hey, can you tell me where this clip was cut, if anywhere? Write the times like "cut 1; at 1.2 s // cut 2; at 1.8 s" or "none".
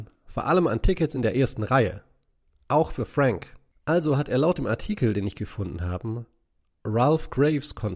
none